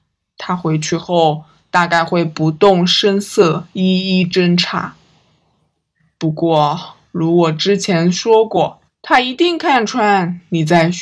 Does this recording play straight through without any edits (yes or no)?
no